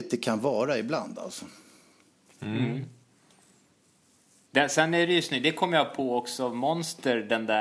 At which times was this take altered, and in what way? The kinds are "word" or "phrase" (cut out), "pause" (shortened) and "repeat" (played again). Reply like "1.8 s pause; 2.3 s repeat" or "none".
none